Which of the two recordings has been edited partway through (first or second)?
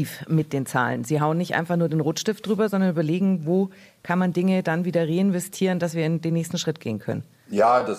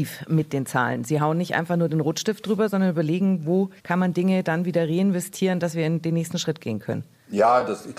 second